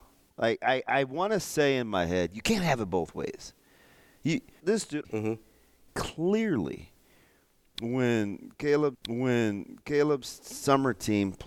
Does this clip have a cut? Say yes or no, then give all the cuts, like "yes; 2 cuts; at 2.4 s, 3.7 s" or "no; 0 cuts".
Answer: yes; 3 cuts; at 4.6 s, 5.0 s, 8.9 s